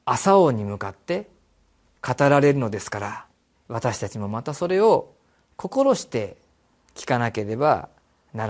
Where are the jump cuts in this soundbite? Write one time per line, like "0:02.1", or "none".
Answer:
0:03.5